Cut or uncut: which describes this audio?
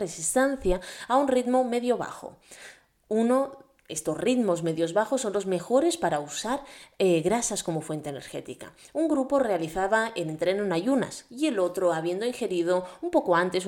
uncut